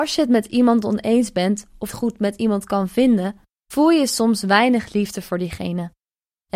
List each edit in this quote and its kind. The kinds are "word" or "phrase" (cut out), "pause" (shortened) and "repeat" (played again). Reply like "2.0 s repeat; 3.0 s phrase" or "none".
1.9 s phrase; 3.5 s pause